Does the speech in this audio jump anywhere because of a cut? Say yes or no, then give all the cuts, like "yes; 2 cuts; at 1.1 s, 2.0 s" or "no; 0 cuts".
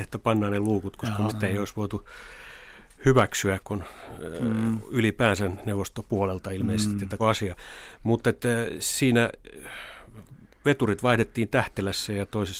yes; 2 cuts; at 1.3 s, 7.2 s